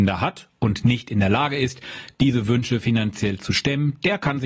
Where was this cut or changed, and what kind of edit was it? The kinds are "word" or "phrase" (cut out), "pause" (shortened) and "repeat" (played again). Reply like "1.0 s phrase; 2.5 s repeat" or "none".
none